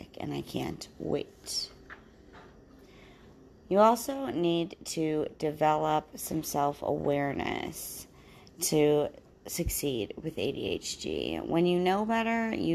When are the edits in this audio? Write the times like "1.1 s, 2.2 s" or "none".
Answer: none